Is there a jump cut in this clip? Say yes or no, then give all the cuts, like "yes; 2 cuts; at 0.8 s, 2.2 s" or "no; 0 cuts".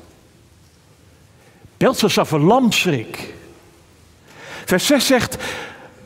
yes; 1 cut; at 2.7 s